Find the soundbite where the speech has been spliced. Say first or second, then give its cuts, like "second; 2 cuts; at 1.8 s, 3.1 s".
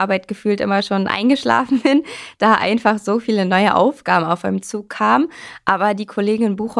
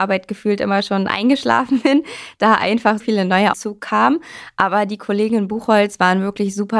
second; 2 cuts; at 3.0 s, 3.5 s